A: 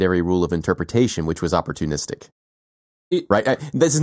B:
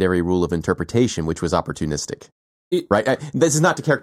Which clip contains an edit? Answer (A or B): B